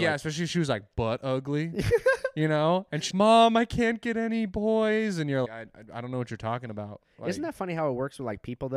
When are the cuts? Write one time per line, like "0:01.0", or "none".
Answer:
0:03.1
0:05.4